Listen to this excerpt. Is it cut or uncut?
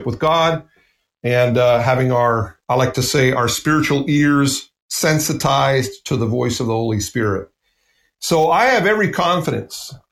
uncut